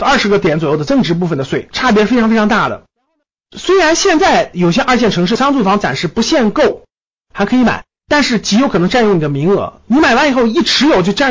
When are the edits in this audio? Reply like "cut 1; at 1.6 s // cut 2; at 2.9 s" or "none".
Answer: none

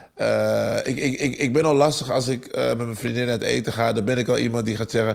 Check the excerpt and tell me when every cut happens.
none

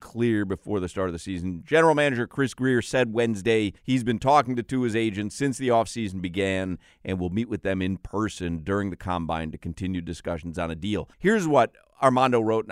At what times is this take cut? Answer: cut 1; at 3.8 s // cut 2; at 11.1 s

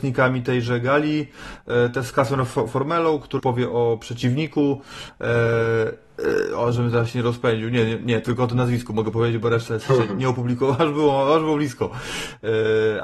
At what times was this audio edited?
cut 1; at 3.4 s

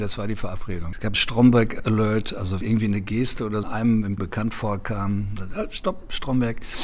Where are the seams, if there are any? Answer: cut 1; at 1.1 s // cut 2; at 2.6 s // cut 3; at 3.6 s // cut 4; at 4.2 s

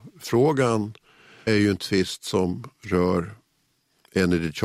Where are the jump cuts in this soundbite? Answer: cut 1; at 1.5 s

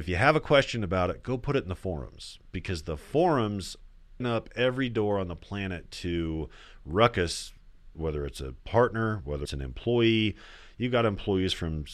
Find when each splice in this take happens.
cut 1; at 4.2 s // cut 2; at 7.9 s // cut 3; at 9.4 s

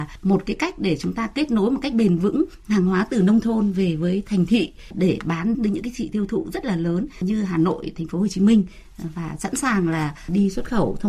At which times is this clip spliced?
cut 1; at 5.5 s // cut 2; at 6.1 s

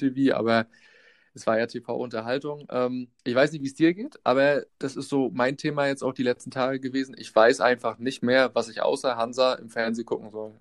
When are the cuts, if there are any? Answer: cut 1; at 3.2 s // cut 2; at 4.7 s

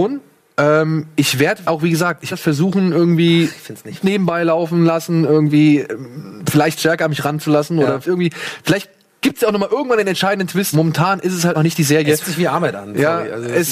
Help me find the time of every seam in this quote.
cut 1; at 1.6 s // cut 2; at 2.3 s // cut 3; at 4.0 s // cut 4; at 8.0 s // cut 5; at 10.7 s // cut 6; at 11.5 s // cut 7; at 12.2 s

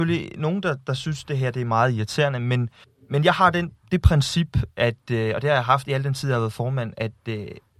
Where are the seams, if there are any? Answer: cut 1; at 2.8 s

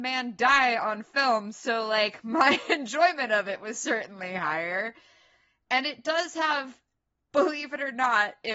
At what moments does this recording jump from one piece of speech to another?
none

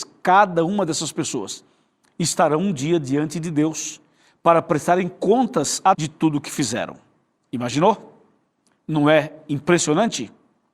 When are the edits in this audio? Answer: cut 1; at 5.9 s

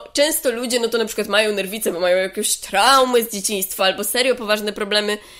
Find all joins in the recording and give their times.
none

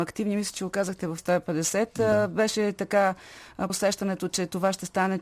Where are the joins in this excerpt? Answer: cut 1; at 1.2 s // cut 2; at 3.7 s

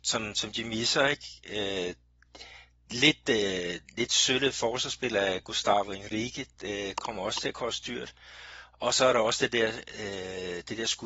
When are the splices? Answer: none

